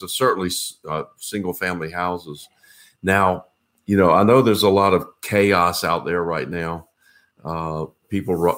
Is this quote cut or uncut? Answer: uncut